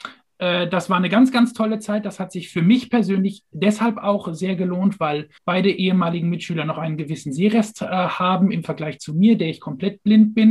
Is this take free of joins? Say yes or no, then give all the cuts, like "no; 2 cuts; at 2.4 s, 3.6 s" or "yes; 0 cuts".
no; 1 cut; at 5.4 s